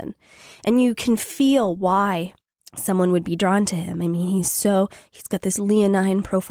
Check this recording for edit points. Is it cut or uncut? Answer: uncut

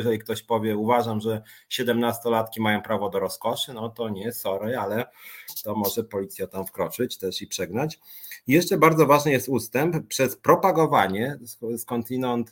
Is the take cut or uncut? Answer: uncut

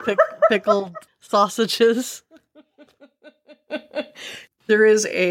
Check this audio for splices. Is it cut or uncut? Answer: uncut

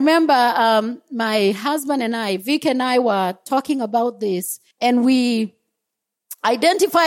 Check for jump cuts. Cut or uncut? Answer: cut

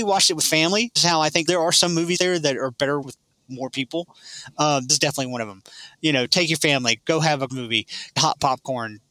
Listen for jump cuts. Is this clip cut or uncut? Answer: cut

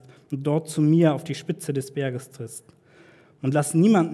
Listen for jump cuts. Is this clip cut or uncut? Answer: uncut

